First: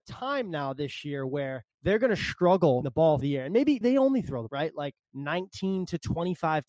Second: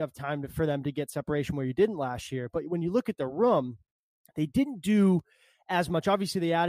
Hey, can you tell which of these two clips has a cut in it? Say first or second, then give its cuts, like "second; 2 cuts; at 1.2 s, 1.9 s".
first; 6 cuts; at 1.7 s, 2.8 s, 3.2 s, 3.8 s, 4.5 s, 5.0 s